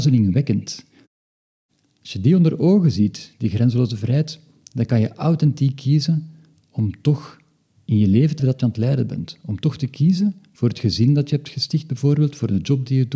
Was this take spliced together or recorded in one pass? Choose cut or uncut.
cut